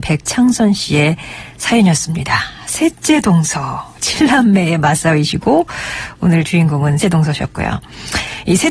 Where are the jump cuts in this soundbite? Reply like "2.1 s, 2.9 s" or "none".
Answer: 7.0 s